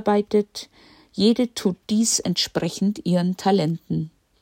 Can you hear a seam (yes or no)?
no